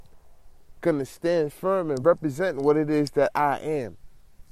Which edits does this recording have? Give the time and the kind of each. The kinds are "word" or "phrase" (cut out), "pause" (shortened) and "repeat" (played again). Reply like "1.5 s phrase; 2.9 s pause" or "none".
none